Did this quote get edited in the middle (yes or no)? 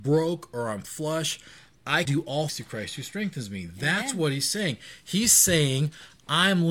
yes